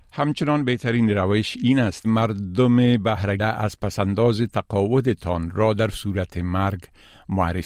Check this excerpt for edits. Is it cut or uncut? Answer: cut